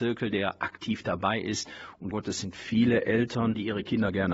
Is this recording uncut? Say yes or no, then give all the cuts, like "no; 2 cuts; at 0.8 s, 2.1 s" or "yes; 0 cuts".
no; 1 cut; at 2.1 s